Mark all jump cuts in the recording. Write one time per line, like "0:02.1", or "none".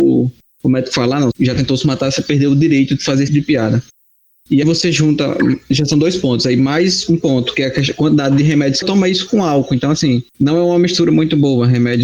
0:01.3
0:03.3
0:04.6
0:08.8
0:10.3